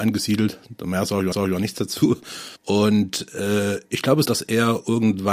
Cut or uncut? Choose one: cut